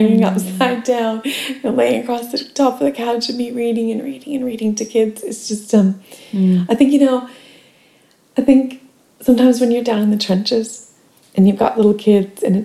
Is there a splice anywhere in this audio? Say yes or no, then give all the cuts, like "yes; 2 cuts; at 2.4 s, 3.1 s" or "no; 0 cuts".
no; 0 cuts